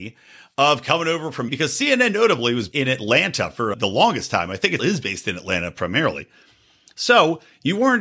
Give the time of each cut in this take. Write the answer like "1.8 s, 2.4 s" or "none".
1.5 s, 2.7 s, 3.7 s, 4.8 s